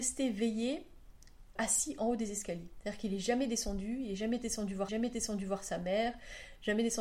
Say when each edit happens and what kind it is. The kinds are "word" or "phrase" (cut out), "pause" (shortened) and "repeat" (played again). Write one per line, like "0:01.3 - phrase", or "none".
0:01.6 - word
0:04.9 - repeat